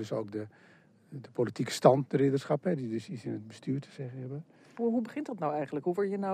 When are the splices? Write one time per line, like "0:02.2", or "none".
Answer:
none